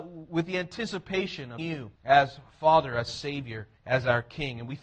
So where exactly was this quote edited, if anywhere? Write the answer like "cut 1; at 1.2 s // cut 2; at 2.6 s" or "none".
cut 1; at 1.6 s // cut 2; at 2.0 s // cut 3; at 3.8 s